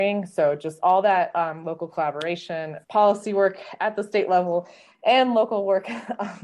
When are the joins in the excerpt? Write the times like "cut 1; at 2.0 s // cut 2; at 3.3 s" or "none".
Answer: cut 1; at 2.8 s

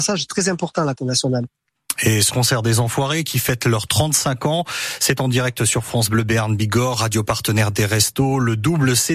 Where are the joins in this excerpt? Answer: cut 1; at 0.9 s // cut 2; at 2.3 s

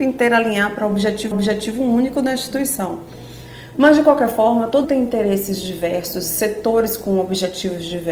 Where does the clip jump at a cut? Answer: cut 1; at 1.3 s // cut 2; at 4.8 s

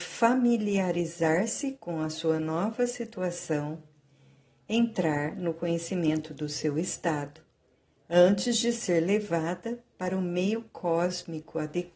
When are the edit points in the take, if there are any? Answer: none

